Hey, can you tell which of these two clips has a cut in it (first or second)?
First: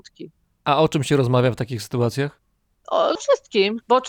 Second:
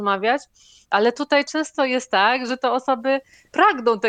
second